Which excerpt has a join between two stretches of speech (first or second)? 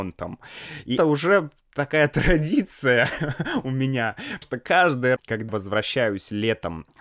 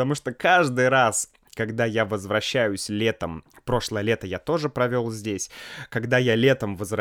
first